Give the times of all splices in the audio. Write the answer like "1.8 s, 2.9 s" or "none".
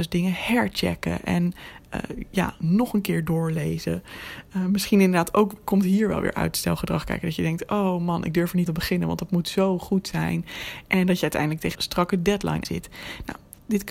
1.9 s, 8.7 s, 11.7 s, 12.6 s